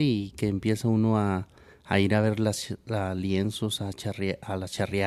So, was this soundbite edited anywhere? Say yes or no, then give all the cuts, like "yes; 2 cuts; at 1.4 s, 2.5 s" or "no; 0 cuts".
no; 0 cuts